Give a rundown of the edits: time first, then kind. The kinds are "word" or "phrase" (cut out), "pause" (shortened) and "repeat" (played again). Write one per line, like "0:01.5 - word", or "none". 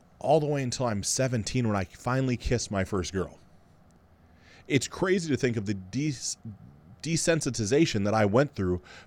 none